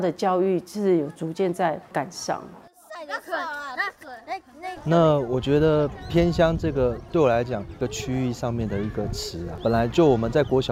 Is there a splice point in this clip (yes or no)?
no